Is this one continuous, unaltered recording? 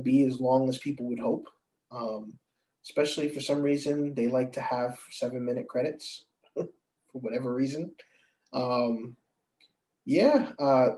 yes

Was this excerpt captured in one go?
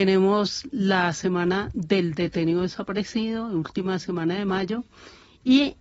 yes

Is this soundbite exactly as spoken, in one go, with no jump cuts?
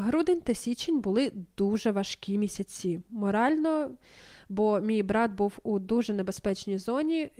yes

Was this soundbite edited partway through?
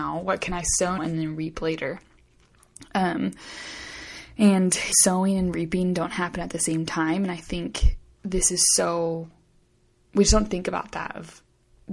yes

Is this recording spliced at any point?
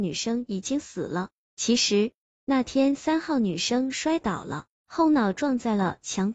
no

